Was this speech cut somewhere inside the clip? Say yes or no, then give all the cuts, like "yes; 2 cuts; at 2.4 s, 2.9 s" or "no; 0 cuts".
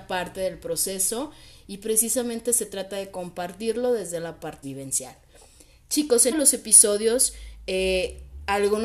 yes; 2 cuts; at 4.6 s, 6.3 s